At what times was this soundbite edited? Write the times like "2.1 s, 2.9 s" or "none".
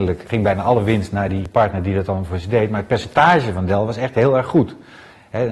none

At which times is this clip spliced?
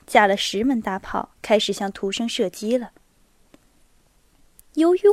1.4 s

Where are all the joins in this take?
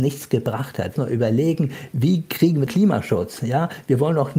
1.0 s, 2.7 s

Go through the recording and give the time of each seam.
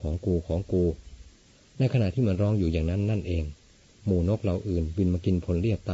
none

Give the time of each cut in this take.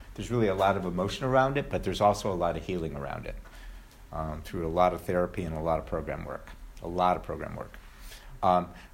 none

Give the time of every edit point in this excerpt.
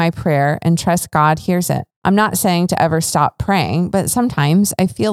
1.9 s

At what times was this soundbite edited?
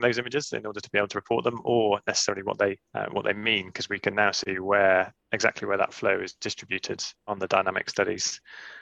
2.9 s, 5.2 s

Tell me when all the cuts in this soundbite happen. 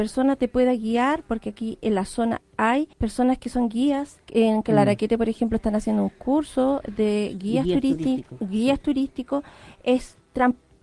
2.9 s, 4.2 s

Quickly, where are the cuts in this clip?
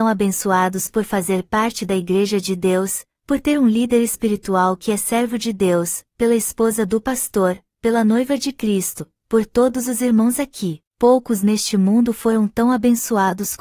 10.9 s

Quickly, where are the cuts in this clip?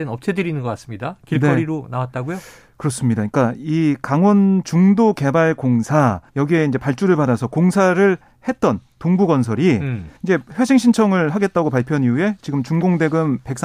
6.3 s, 10.2 s

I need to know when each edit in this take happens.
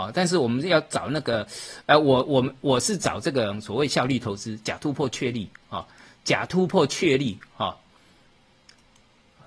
none

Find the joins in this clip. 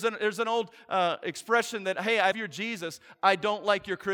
2.3 s

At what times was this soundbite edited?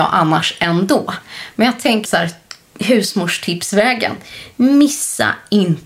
2.1 s

